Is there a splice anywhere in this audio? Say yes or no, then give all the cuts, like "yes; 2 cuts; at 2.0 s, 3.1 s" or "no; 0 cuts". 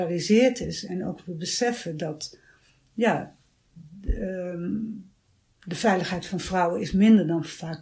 no; 0 cuts